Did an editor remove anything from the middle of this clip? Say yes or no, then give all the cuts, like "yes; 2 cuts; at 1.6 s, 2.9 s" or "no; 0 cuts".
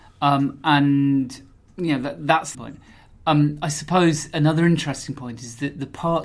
yes; 2 cuts; at 1.5 s, 2.5 s